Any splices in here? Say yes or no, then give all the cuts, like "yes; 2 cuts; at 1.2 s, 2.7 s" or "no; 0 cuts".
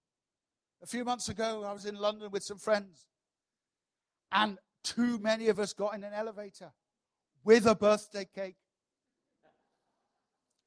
no; 0 cuts